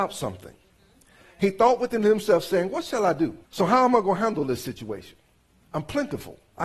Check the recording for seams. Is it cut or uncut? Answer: cut